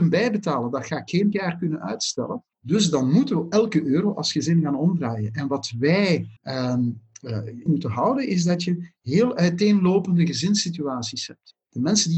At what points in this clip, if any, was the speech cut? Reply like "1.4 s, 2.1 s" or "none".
1.3 s, 2.5 s, 6.4 s, 7.7 s